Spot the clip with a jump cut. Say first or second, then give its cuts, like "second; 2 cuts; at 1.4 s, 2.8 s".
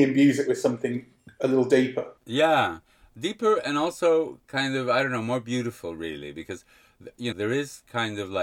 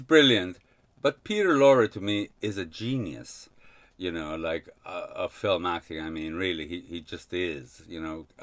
first; 2 cuts; at 2.2 s, 7.3 s